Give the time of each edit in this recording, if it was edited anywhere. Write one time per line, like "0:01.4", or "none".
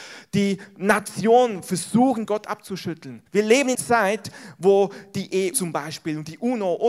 0:02.3
0:03.3
0:03.7
0:05.5